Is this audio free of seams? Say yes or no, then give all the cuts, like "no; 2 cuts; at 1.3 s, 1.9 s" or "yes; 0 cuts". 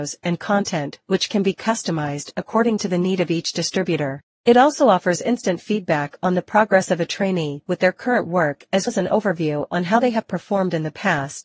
no; 1 cut; at 8.9 s